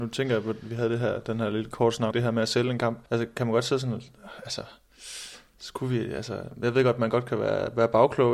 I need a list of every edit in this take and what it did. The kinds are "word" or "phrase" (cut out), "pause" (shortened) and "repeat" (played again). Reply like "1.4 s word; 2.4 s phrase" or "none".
2.1 s word; 3.1 s pause